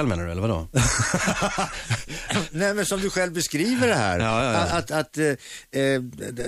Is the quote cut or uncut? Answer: cut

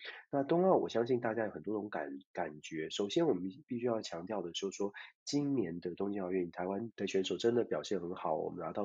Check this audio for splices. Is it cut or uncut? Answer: cut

